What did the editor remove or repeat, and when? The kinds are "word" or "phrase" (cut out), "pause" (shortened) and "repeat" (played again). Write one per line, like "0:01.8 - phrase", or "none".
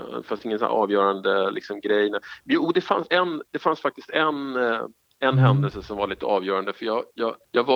none